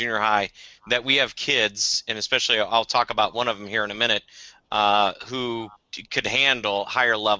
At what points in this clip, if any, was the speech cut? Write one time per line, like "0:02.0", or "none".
0:05.7